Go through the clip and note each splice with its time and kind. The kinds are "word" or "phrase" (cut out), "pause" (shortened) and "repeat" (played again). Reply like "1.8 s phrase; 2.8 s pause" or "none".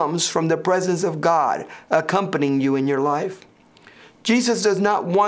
none

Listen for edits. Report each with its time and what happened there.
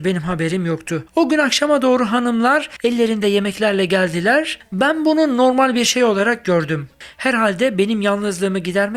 1.1 s pause

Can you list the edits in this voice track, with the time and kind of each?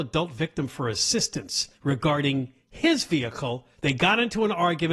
1.7 s pause; 3.7 s pause

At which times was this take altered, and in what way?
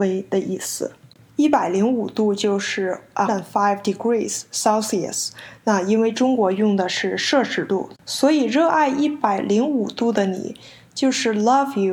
3.3 s word; 7.9 s word

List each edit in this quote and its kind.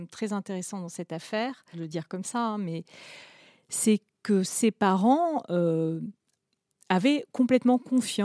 1.7 s word

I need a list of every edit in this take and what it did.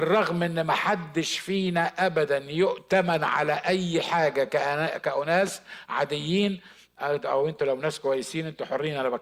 none

